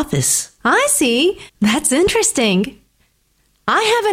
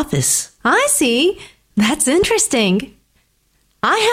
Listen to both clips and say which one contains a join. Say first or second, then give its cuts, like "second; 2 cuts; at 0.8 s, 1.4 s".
first; 1 cut; at 1.5 s